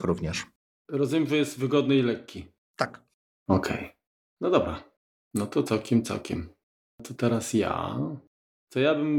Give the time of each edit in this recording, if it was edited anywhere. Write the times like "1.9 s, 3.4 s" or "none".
none